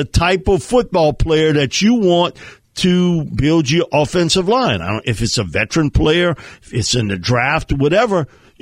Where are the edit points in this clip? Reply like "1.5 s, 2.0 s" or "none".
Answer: none